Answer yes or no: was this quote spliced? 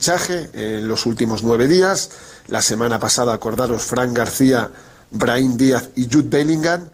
no